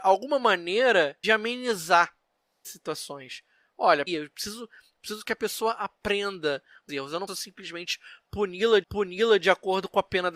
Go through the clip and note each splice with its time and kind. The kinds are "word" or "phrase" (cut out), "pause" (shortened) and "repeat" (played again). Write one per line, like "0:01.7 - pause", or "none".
0:01.2 - word
0:02.6 - word
0:04.1 - word
0:06.9 - word
0:07.3 - word
0:08.8 - repeat